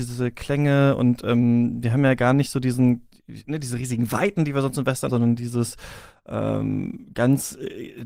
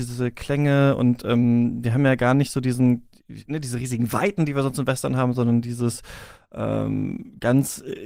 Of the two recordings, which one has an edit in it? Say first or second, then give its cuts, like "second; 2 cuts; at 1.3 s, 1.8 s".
first; 1 cut; at 5.1 s